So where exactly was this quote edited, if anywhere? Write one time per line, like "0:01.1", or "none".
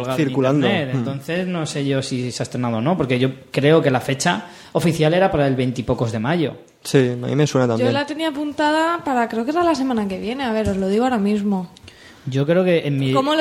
none